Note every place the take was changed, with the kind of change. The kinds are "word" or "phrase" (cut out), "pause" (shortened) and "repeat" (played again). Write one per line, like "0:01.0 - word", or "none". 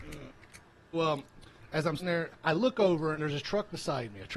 0:00.9 - word
0:02.0 - word
0:02.3 - word
0:03.2 - word